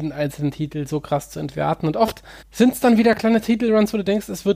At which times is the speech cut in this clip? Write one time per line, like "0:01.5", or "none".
0:02.4